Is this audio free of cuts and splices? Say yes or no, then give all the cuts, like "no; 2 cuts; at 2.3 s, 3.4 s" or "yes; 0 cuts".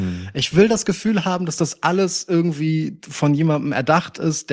yes; 0 cuts